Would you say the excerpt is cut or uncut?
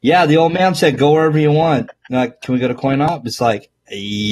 uncut